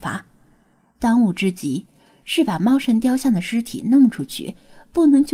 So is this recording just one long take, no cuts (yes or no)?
yes